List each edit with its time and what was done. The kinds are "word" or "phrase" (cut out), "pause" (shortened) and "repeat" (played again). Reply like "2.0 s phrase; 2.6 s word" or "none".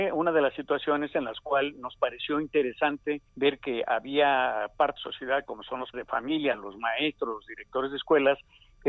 3.3 s pause; 5.0 s phrase; 5.9 s word